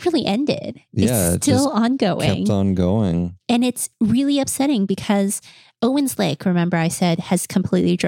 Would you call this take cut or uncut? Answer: uncut